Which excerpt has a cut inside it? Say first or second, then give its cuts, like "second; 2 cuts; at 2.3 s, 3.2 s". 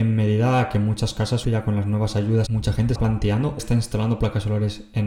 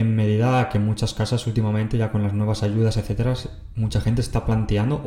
first; 4 cuts; at 1.4 s, 2.5 s, 3.0 s, 3.6 s